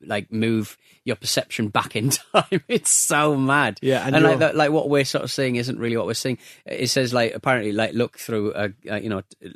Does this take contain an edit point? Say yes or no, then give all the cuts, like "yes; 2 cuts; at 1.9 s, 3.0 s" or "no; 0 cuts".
no; 0 cuts